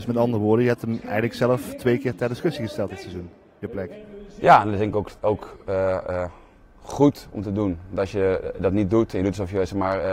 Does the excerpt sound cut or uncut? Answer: uncut